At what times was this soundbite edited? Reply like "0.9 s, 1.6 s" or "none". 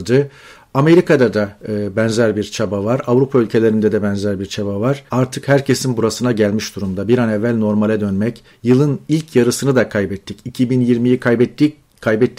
1.6 s, 5.1 s